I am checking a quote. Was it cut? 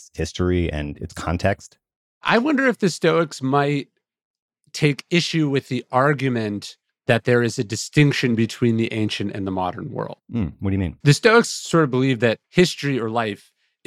yes; 3 cuts; at 6.9 s, 11.0 s, 12.4 s

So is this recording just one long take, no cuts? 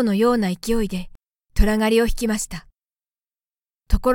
yes; 0 cuts

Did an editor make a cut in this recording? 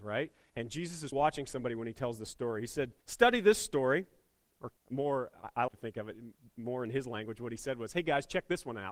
yes; 4 cuts; at 1.1 s, 3.0 s, 4.8 s, 5.7 s

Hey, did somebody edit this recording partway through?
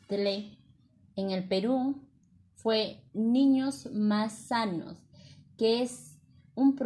no; 0 cuts

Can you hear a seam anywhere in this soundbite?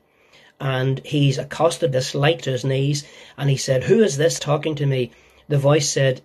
yes; 3 cuts; at 1.9 s, 2.4 s, 4.4 s

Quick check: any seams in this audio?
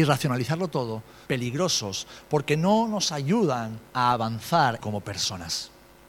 yes; 3 cuts; at 1.3 s, 3.9 s, 4.8 s

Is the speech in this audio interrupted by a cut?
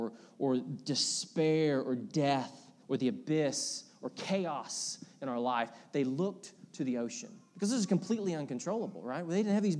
yes; 1 cut; at 2.8 s

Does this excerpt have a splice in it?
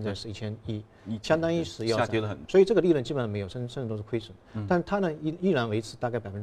yes; 1 cut; at 2.5 s

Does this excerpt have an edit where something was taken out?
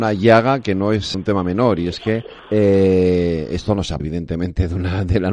yes; 3 cuts; at 1.1 s, 2.4 s, 4.0 s

